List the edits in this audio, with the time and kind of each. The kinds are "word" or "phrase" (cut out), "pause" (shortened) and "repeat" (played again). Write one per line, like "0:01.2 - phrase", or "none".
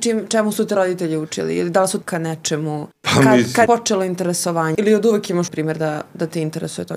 0:02.0 - word
0:02.9 - pause
0:03.7 - word
0:04.7 - word
0:05.5 - phrase